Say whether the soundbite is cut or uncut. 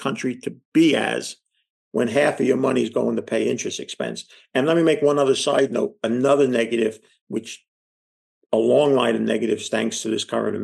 uncut